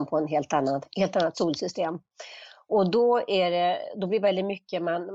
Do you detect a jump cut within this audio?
no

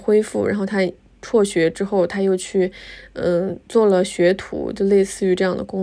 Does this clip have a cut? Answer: no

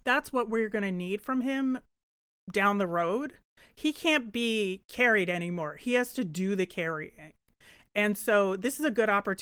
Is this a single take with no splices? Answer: yes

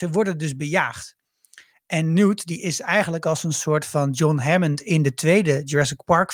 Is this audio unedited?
yes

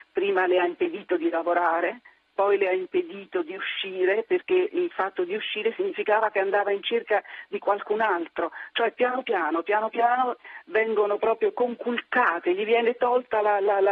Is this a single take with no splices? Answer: yes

